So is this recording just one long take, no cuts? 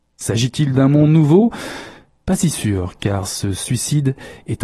yes; 0 cuts

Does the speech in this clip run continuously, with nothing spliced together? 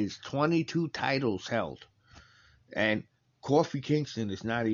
yes; 0 cuts

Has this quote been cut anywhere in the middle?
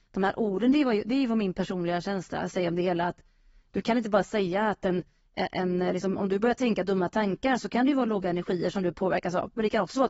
no; 0 cuts

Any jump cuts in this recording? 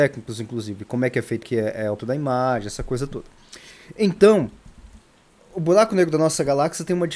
yes; 3 cuts; at 1.4 s, 2.0 s, 5.4 s

